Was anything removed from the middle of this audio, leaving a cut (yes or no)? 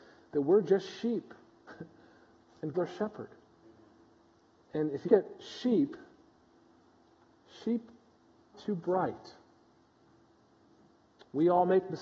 yes